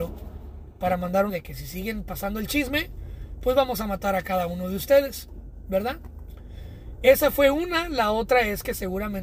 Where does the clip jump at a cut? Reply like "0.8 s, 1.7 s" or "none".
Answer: 1.3 s